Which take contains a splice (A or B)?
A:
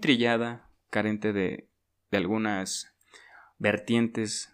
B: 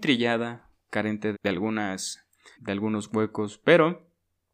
B